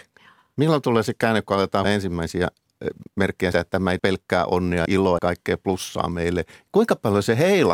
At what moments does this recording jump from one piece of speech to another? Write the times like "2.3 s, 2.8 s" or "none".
1.8 s, 3.5 s, 4.0 s, 4.9 s, 5.2 s